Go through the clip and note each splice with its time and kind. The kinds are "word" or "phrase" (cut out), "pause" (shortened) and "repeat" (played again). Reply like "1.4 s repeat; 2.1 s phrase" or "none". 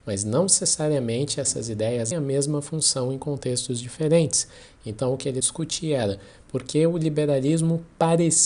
2.1 s word; 5.4 s phrase